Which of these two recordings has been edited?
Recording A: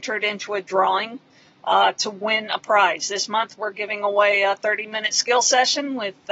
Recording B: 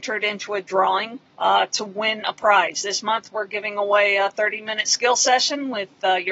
B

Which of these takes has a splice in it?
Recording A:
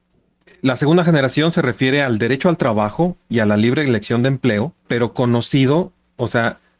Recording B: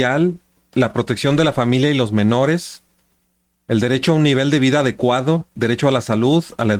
A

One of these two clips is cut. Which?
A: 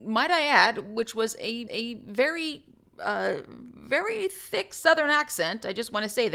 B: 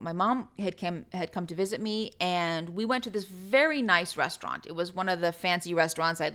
A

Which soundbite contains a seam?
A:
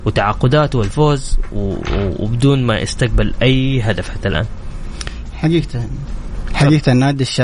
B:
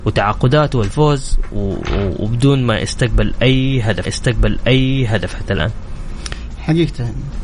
B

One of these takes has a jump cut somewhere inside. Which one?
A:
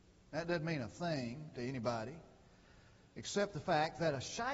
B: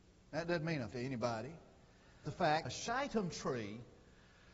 B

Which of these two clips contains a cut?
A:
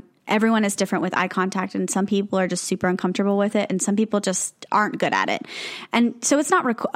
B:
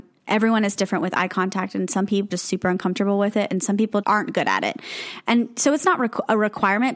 B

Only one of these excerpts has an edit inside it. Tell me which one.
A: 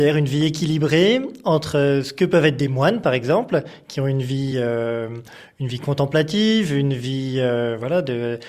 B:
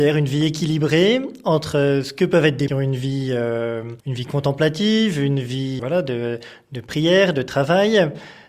B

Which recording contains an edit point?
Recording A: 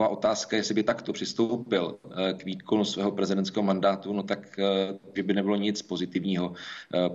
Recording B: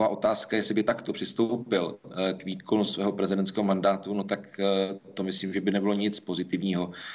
A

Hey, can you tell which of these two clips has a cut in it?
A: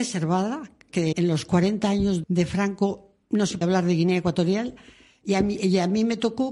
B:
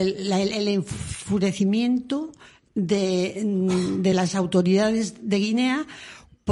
A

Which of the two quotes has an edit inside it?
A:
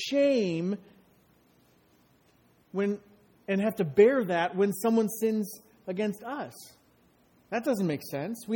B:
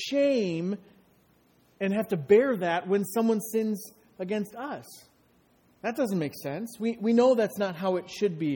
B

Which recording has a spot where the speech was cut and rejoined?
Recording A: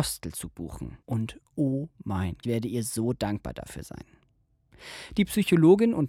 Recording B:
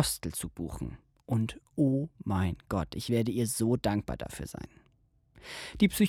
A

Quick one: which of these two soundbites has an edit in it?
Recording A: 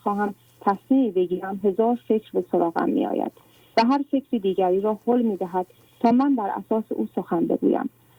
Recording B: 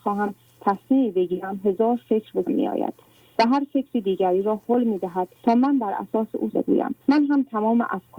B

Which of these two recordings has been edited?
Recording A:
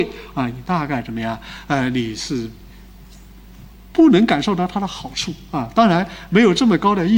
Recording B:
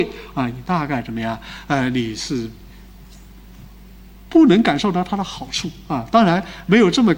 A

